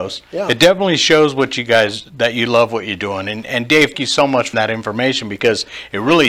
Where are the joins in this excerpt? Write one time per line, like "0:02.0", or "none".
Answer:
0:03.9
0:04.5